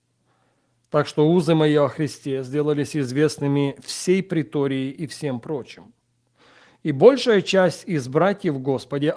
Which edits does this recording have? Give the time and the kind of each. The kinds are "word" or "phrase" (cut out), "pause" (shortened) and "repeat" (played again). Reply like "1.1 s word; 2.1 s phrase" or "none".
none